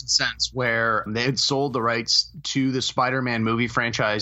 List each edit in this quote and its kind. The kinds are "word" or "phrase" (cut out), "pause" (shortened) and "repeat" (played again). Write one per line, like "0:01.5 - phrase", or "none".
0:01.1 - word

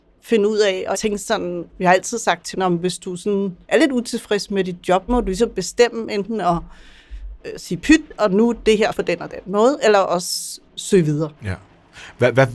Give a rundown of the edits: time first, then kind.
0:00.9 - word
0:01.7 - pause
0:02.5 - phrase
0:03.6 - pause
0:05.1 - word
0:07.4 - pause
0:08.9 - word
0:10.7 - pause
0:11.4 - pause

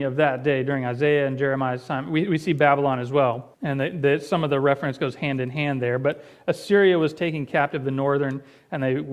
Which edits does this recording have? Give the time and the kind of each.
0:03.5 - pause

